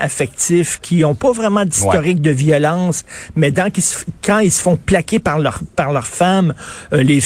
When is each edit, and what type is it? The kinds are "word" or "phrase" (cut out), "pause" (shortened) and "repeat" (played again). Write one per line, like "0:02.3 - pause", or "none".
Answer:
none